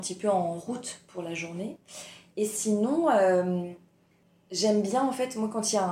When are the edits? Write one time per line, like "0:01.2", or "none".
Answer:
none